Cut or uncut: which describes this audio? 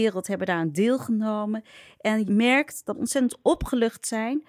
cut